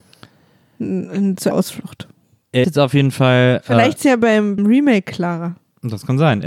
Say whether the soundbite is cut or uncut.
cut